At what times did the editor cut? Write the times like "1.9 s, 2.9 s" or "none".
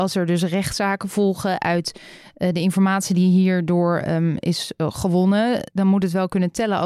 none